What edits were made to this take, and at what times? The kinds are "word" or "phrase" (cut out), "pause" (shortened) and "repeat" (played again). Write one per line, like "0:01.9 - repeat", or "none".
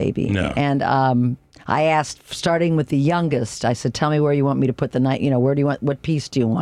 none

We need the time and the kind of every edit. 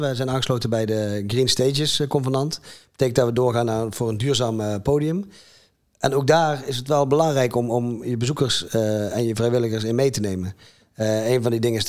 none

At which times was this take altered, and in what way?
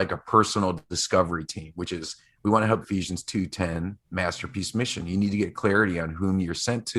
0:02.8 - phrase
0:04.0 - pause

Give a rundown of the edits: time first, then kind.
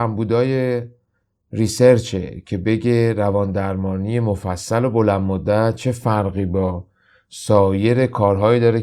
none

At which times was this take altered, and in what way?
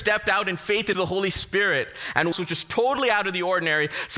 0:00.9 - word
0:02.3 - phrase

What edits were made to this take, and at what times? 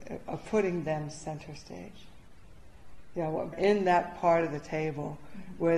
0:03.5 - phrase

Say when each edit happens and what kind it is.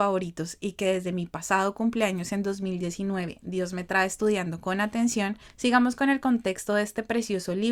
none

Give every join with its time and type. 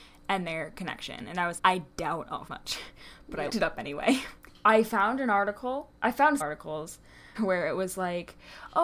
0:01.6 - word
0:02.5 - word
0:03.5 - word
0:06.4 - word
0:07.3 - word

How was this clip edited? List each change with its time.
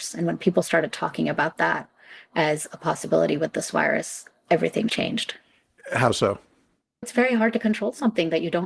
0:04.9 - word
0:07.0 - word

